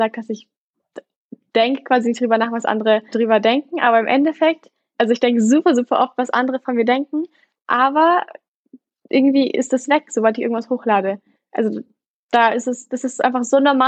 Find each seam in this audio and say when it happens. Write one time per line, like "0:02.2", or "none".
0:03.1